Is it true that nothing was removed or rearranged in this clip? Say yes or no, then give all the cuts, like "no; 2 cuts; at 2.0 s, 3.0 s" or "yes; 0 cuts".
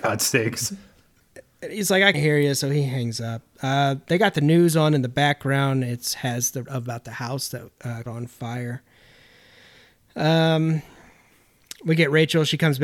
no; 3 cuts; at 2.1 s, 6.7 s, 8.1 s